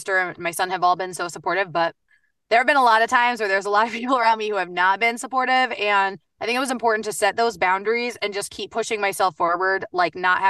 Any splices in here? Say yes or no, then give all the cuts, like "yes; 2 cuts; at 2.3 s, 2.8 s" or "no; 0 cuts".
no; 0 cuts